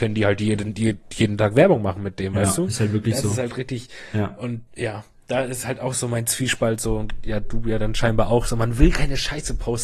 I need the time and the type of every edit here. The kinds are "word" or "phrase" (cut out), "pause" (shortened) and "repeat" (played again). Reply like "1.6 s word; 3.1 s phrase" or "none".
4.7 s pause